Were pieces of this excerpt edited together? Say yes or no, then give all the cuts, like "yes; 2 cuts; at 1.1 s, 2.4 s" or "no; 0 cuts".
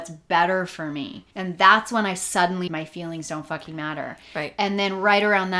yes; 2 cuts; at 1.3 s, 2.7 s